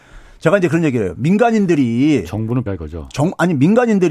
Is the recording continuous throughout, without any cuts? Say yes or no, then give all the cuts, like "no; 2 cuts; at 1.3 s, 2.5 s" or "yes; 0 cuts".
no; 1 cut; at 2.7 s